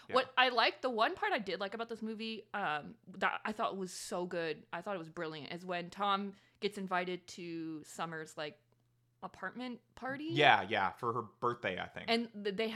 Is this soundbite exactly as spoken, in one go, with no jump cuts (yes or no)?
yes